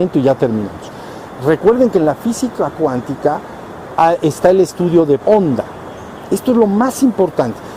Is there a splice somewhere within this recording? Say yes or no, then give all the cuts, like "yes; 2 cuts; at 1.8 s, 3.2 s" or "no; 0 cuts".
yes; 1 cut; at 5.2 s